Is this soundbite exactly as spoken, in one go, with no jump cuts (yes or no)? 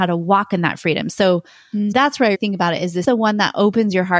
no